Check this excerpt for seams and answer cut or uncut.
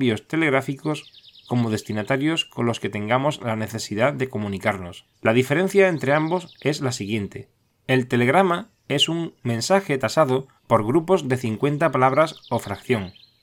cut